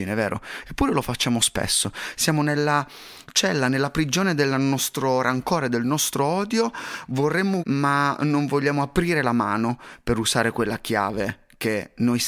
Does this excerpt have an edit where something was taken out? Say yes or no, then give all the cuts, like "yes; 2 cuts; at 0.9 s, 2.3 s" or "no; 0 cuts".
yes; 1 cut; at 7.6 s